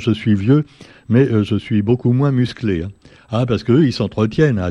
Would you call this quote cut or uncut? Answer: uncut